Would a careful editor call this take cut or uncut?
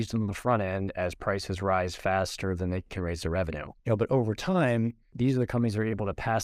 cut